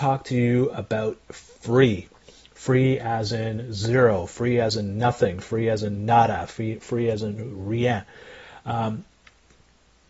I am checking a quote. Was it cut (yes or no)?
no